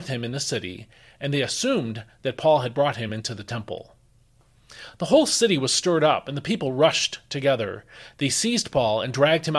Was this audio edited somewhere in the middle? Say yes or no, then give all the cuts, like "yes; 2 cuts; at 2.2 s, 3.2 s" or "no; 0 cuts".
no; 0 cuts